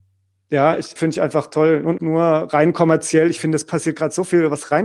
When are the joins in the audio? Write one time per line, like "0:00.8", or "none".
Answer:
0:01.0
0:02.0